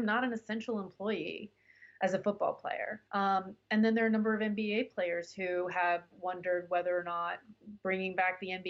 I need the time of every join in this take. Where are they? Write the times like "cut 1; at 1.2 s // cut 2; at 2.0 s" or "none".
cut 1; at 3.1 s